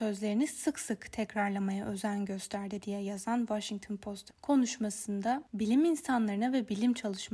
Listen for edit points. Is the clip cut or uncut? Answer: cut